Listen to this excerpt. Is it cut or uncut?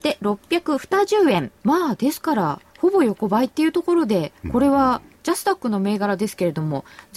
cut